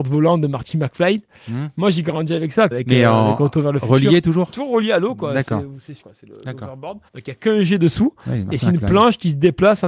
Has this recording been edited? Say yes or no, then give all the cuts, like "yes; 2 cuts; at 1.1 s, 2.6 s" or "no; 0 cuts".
yes; 3 cuts; at 2.7 s, 6.0 s, 7.1 s